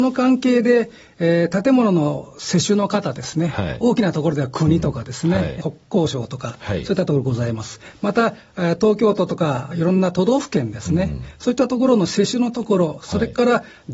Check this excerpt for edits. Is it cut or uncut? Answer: uncut